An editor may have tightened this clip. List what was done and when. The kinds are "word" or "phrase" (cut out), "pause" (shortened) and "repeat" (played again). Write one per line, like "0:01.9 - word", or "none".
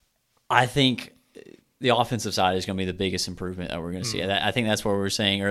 0:01.6 - pause